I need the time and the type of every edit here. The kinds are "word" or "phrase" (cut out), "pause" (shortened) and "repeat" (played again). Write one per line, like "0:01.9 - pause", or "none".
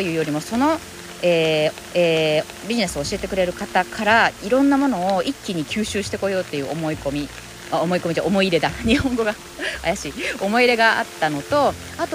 0:01.9 - repeat